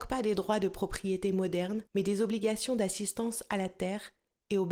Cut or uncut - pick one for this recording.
cut